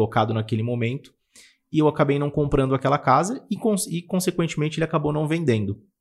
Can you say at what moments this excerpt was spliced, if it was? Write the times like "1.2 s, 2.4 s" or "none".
none